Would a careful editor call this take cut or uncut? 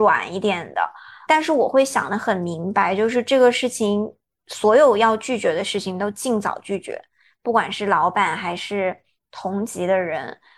cut